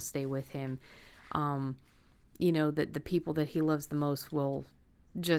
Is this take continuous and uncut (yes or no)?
yes